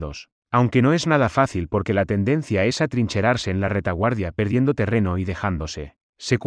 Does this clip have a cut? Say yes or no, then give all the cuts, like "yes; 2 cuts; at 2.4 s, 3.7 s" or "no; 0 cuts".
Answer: no; 0 cuts